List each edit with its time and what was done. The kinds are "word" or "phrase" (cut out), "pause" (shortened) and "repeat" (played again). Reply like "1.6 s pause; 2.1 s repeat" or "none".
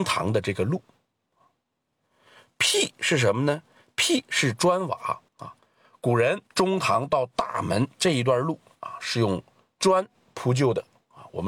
5.3 s pause; 6.5 s pause